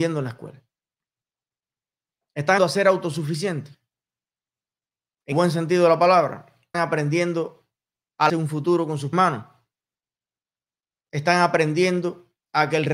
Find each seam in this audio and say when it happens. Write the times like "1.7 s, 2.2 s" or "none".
2.6 s, 5.3 s, 6.7 s, 8.3 s, 9.1 s